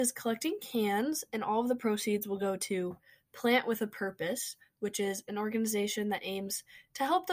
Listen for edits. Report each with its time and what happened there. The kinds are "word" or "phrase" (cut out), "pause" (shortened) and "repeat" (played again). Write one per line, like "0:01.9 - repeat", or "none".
none